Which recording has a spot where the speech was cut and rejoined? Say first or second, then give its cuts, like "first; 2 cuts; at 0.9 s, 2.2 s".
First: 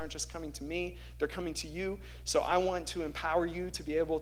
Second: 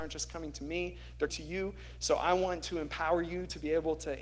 second; 1 cut; at 1.3 s